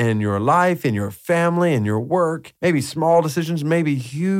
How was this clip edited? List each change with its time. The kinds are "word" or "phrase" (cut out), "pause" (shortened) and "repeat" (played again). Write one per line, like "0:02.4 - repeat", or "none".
0:02.6 - pause